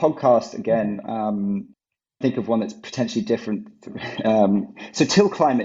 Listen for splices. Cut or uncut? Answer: cut